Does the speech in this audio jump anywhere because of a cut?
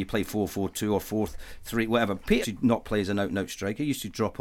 yes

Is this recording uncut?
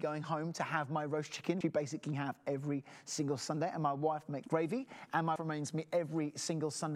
no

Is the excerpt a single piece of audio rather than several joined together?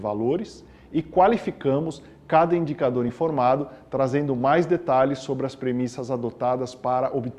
yes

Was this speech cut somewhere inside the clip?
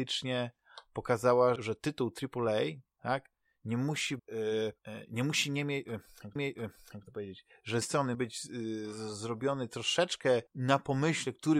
yes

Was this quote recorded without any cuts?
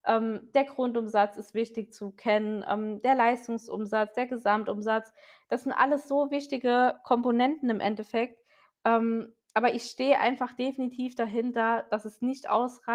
yes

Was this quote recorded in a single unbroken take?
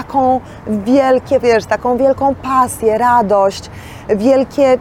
no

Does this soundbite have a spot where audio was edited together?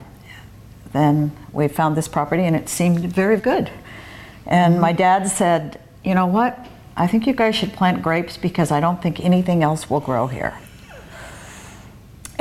yes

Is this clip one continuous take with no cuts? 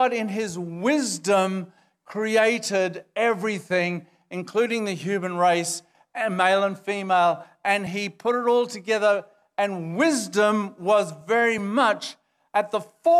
yes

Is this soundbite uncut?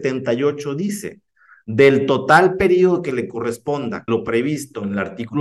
no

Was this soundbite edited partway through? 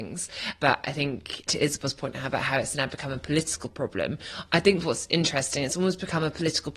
no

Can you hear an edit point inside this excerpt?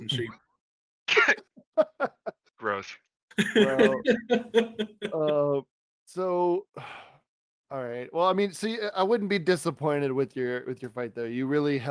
no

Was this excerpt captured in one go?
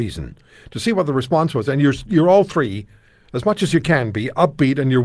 yes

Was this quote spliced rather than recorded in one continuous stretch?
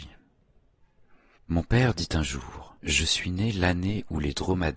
yes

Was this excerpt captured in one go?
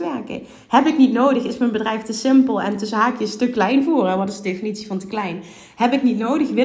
yes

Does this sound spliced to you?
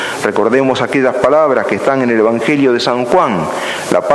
no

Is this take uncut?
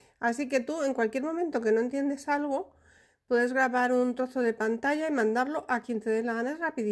yes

